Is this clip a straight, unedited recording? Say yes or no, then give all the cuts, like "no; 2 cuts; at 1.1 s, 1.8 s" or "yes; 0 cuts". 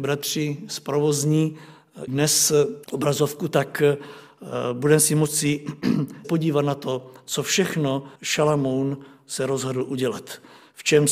no; 4 cuts; at 2.1 s, 2.8 s, 6.2 s, 8.2 s